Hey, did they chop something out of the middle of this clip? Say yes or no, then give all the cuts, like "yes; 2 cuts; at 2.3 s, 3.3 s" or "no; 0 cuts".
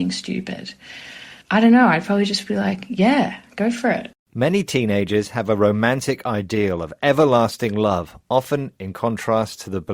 yes; 2 cuts; at 1.4 s, 4.2 s